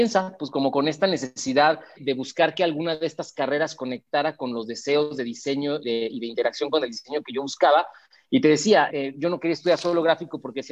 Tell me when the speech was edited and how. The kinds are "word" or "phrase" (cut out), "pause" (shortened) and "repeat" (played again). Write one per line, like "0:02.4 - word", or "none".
0:01.9 - word
0:05.8 - word
0:08.9 - word